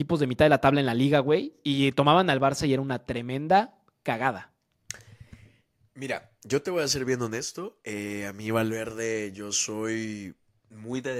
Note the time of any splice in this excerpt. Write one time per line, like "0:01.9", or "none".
none

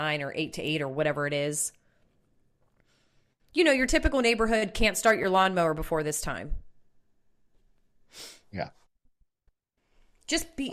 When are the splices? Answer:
none

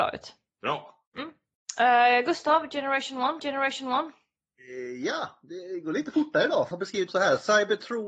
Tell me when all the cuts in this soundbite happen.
0:01.1
0:03.4
0:06.7
0:07.1

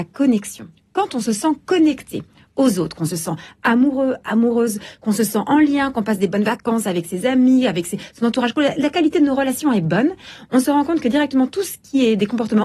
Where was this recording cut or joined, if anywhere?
none

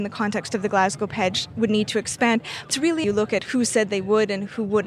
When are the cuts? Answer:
0:02.7
0:03.0

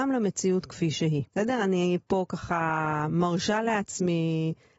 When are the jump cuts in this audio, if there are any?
0:01.3

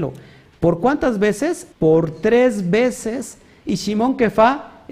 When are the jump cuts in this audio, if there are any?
0:01.7

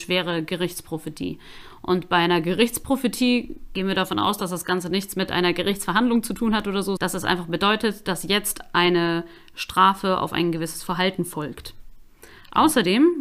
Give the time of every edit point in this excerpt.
0:07.0

